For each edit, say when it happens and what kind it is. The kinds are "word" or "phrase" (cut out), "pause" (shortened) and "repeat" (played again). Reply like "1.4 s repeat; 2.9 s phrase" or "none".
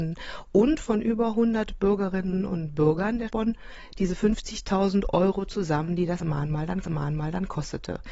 3.3 s word; 6.8 s repeat